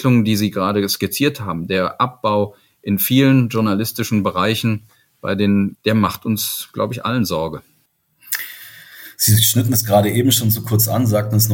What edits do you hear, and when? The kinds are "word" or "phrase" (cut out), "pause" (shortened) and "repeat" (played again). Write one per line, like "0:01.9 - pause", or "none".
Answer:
0:05.7 - phrase